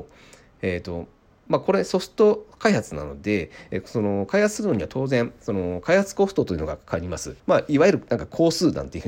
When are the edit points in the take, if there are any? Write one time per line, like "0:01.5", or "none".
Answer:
0:07.4